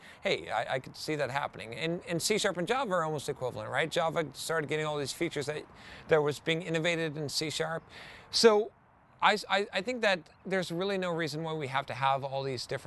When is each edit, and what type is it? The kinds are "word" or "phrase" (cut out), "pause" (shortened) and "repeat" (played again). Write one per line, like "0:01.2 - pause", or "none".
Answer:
none